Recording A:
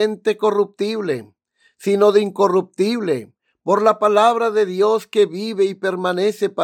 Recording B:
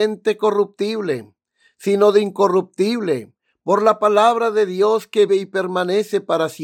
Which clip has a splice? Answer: B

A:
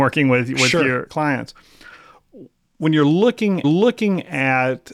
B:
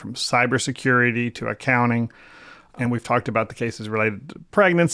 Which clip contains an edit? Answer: A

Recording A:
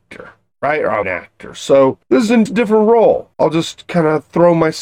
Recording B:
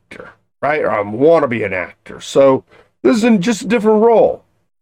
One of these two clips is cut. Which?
A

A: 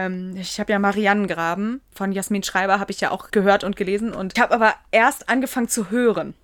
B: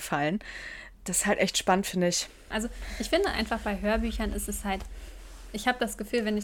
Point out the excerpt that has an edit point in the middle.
A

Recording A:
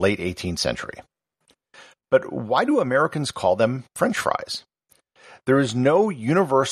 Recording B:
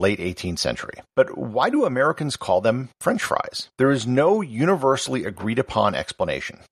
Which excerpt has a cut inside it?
B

